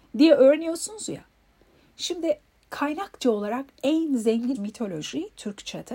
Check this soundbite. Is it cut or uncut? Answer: cut